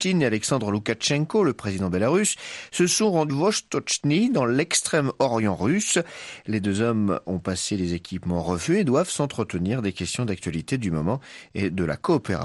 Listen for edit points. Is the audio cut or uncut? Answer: cut